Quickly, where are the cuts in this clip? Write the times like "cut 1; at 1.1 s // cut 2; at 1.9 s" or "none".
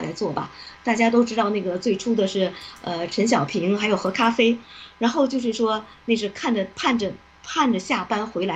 none